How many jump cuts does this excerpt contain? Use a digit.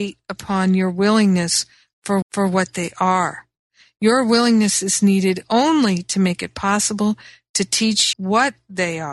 2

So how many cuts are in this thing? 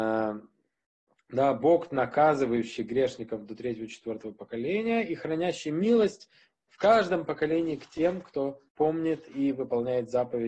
1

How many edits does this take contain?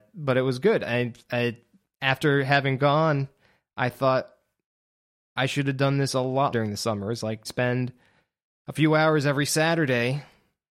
2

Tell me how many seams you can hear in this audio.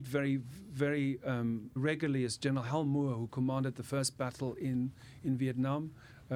1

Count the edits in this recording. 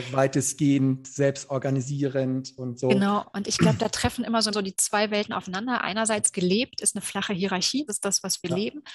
2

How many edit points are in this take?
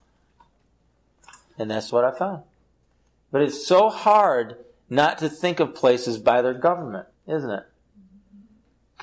3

